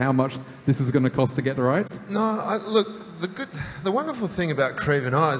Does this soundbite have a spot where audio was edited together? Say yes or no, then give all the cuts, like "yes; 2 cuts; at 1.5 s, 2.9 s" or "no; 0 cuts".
no; 0 cuts